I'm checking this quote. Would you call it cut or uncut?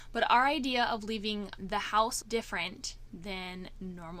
cut